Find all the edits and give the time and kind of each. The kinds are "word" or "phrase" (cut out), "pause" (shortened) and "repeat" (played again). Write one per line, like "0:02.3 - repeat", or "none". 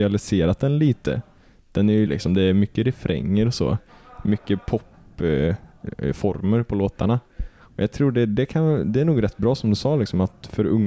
0:02.1 - phrase